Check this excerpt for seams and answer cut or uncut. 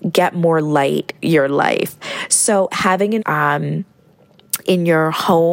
cut